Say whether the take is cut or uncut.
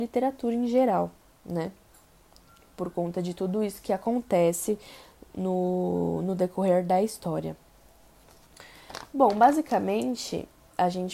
uncut